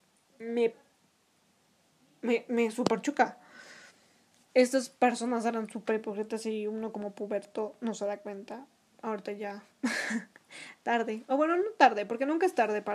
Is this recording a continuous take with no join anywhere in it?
yes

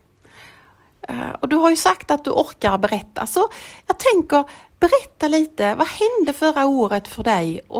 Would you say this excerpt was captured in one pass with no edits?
yes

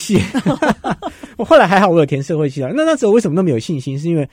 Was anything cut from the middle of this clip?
no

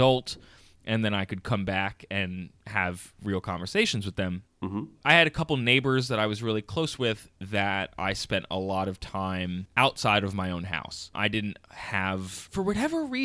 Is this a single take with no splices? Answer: yes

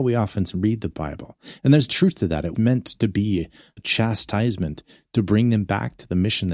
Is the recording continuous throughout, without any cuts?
no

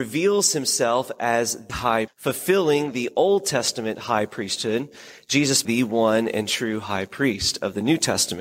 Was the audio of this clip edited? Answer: yes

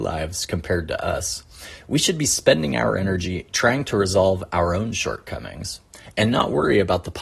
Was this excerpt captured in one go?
yes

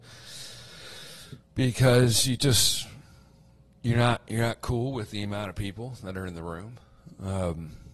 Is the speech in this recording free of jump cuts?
yes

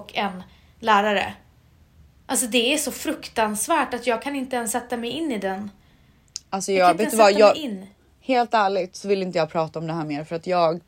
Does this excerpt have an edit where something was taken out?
no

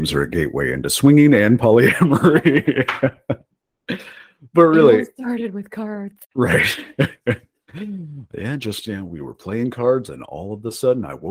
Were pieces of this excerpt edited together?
no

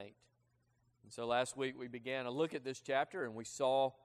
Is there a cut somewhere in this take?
no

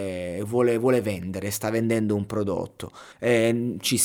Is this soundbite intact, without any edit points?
no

